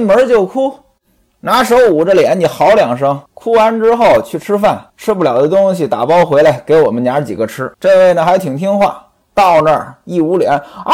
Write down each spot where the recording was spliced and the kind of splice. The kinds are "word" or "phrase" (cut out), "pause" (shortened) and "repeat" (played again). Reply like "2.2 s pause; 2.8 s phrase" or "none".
3.3 s pause; 4.9 s pause; 7.7 s pause; 9.1 s pause